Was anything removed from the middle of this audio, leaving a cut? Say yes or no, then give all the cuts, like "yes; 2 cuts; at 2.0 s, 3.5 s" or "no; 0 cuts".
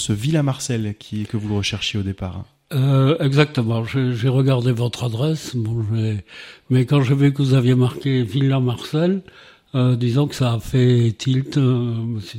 no; 0 cuts